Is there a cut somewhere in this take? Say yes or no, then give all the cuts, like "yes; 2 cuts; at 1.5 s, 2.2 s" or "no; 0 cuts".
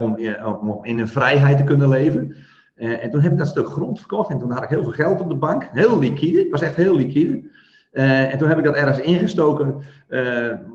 no; 0 cuts